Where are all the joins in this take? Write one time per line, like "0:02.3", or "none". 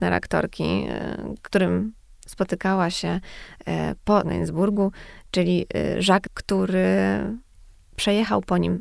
0:01.5
0:04.2
0:06.3